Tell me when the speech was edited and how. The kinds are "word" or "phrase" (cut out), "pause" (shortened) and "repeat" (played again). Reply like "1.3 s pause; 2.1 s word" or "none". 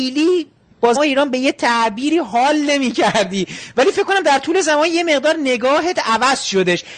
1.0 s word